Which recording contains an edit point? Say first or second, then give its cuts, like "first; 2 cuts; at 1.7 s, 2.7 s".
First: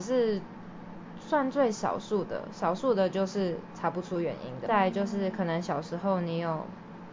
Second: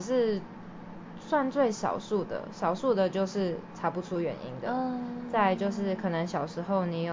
first; 1 cut; at 4.7 s